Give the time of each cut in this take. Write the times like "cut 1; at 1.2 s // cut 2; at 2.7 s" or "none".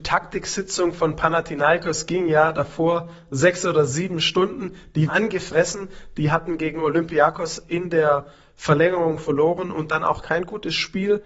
cut 1; at 5.1 s